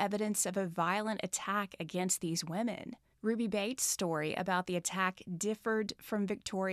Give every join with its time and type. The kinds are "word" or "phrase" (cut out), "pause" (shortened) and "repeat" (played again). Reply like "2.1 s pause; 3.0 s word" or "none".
3.1 s pause